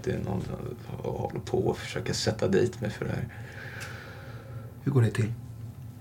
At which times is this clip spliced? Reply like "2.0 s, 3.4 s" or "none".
none